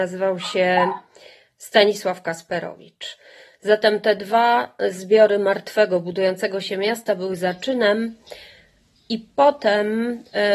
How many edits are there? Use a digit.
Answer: 0